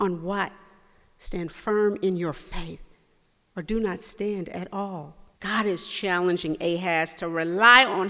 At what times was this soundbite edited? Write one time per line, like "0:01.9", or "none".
0:05.3